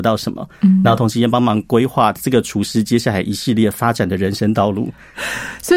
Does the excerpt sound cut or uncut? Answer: uncut